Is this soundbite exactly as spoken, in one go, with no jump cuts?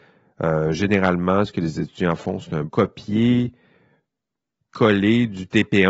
no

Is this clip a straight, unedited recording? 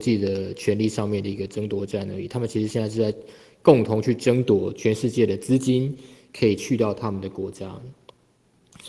yes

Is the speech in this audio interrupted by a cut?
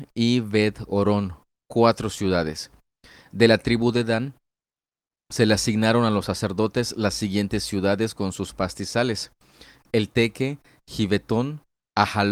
no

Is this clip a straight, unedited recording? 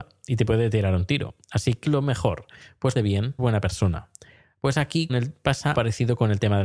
no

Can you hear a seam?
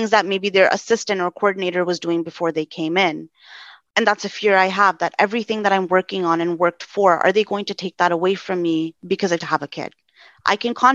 yes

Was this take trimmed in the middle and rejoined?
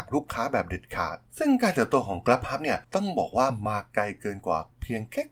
yes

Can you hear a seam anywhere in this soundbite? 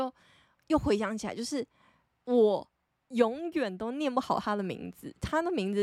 no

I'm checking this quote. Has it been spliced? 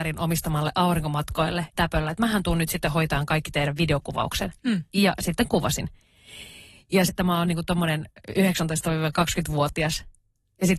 yes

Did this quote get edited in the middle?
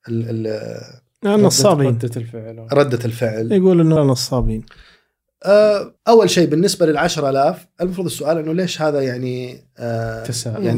yes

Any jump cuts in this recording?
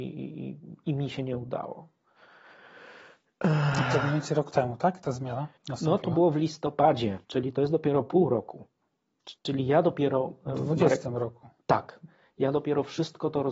yes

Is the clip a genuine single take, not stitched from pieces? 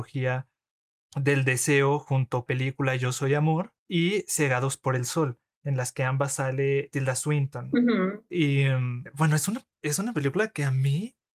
no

